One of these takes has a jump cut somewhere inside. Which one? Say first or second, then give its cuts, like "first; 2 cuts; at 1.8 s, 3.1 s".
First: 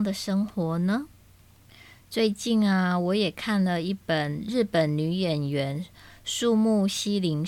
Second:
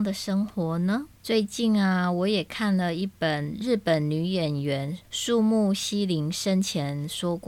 second; 2 cuts; at 1.1 s, 5.0 s